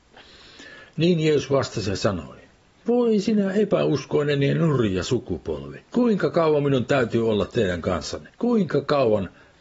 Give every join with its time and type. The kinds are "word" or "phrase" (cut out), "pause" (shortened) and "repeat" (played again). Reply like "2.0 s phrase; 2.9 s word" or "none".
2.6 s pause; 5.8 s pause; 8.3 s pause